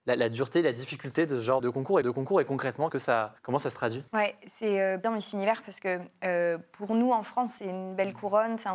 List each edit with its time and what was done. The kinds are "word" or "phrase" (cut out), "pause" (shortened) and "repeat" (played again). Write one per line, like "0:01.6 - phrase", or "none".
0:01.6 - word
0:02.0 - repeat
0:02.9 - word
0:03.4 - pause
0:04.1 - pause
0:05.0 - word
0:07.6 - phrase

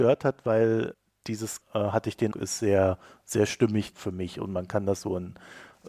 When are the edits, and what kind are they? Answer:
0:01.6 - word
0:02.3 - word
0:03.9 - word

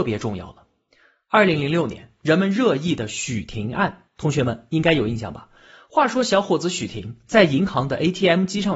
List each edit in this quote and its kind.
0:04.1 - pause

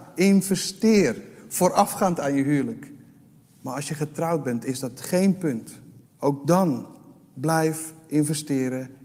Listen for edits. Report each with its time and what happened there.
0:03.4 - pause
0:06.1 - pause

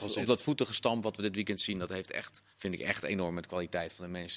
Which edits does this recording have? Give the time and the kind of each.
0:02.5 - pause

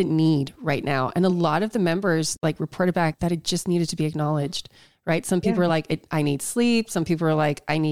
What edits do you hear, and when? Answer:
none

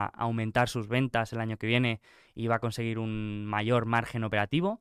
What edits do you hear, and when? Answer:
none

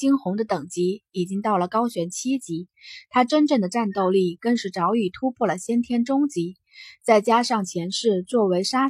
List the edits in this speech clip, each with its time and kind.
none

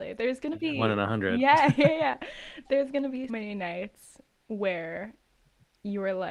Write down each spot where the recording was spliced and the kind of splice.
0:03.3 - word

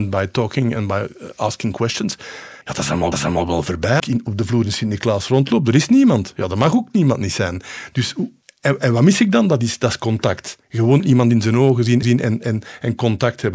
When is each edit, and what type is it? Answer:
0:02.6 - pause
0:03.1 - repeat
0:04.0 - phrase
0:08.4 - pause
0:10.6 - pause
0:12.0 - repeat

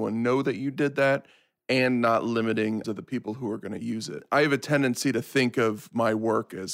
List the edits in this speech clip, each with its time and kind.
0:02.8 - word

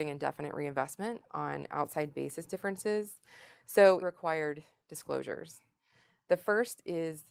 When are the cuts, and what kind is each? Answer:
0:04.0 - phrase

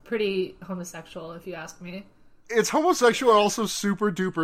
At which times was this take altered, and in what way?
none

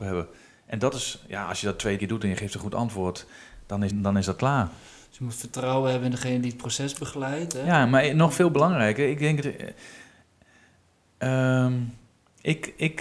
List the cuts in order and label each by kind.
0:02.0 - word
0:03.9 - word
0:09.4 - word

